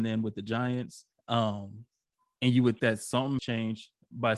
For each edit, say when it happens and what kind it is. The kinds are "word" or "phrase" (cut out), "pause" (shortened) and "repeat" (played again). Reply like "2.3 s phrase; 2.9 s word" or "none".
1.1 s pause; 2.8 s word; 3.4 s word